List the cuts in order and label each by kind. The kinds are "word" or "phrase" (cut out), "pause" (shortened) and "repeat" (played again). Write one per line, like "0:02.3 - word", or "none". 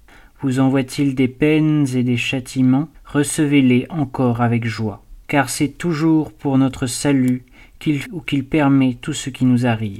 0:02.9 - pause
0:05.2 - pause
0:08.0 - word